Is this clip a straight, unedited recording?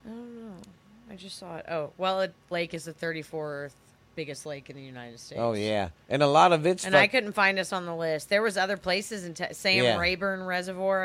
no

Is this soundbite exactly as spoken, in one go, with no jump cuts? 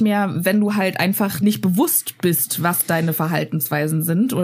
no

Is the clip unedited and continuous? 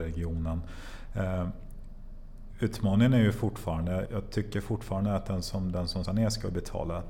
no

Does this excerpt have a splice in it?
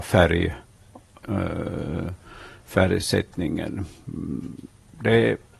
no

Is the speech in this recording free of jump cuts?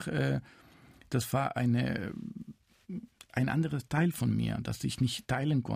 yes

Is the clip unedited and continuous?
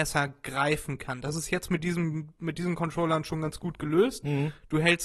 yes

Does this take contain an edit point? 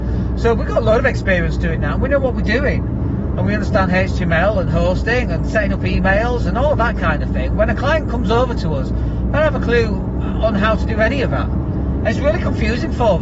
no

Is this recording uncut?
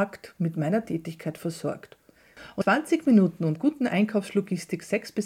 no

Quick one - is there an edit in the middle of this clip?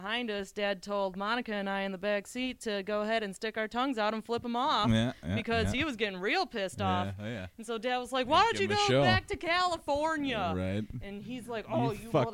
no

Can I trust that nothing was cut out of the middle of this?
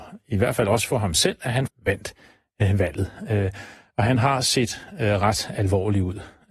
no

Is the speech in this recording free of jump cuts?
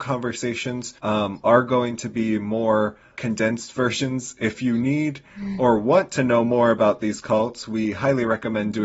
no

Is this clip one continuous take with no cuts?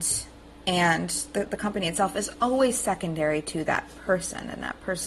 yes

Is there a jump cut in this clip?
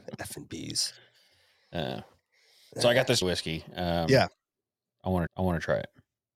yes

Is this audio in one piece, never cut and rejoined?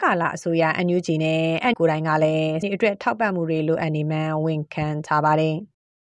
no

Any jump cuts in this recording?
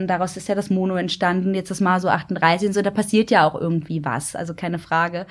no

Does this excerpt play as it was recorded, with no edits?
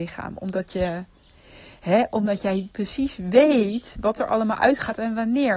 yes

